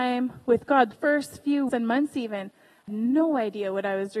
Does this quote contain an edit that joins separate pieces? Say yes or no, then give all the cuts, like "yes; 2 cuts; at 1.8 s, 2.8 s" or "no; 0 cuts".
yes; 3 cuts; at 0.9 s, 1.7 s, 2.9 s